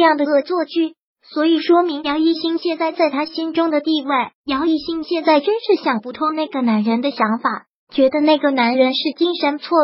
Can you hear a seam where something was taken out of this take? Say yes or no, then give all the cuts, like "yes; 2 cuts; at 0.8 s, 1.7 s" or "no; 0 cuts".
yes; 1 cut; at 4.3 s